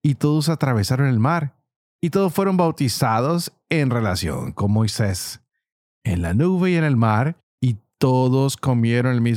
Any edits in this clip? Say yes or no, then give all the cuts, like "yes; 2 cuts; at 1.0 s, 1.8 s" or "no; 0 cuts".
no; 0 cuts